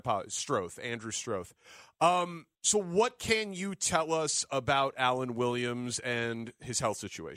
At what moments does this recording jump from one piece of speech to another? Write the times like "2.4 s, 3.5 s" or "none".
2.5 s